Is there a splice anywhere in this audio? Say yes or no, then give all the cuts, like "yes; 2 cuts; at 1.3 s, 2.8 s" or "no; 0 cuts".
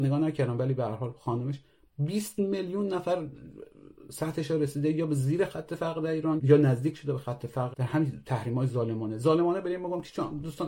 yes; 2 cuts; at 6.4 s, 7.7 s